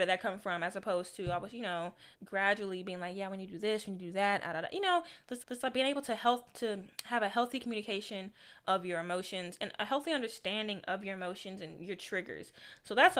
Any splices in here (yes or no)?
yes